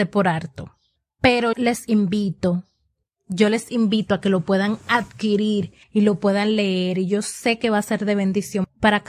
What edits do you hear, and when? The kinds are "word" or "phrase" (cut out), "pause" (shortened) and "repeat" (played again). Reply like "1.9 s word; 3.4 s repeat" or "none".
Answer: 1.5 s word; 5.8 s pause